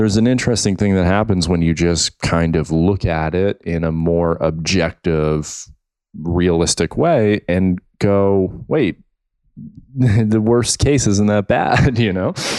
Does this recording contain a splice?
no; 0 cuts

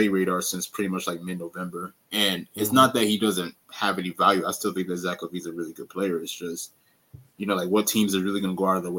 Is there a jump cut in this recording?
yes; 1 cut; at 2.0 s

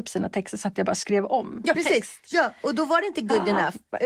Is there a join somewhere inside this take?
yes; 1 cut; at 1.7 s

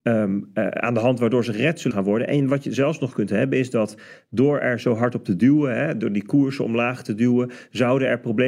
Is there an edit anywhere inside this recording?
yes; 1 cut; at 1.9 s

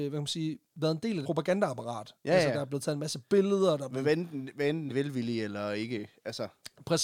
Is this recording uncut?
no; 2 cuts; at 1.2 s, 4.9 s

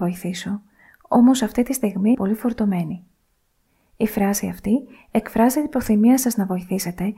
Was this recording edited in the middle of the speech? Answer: yes; 1 cut; at 2.1 s

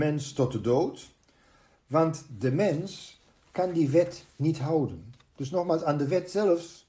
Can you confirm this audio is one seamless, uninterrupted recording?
yes; 0 cuts

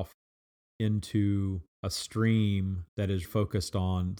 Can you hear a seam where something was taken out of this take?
yes; 3 cuts; at 1.7 s, 2.9 s, 3.2 s

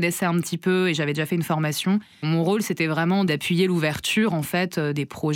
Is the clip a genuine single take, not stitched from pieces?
no; 1 cut; at 2.1 s

